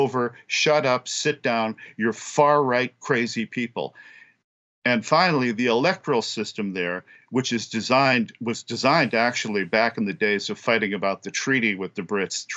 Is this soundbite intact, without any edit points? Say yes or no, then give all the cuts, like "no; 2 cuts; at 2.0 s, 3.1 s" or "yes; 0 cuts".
yes; 0 cuts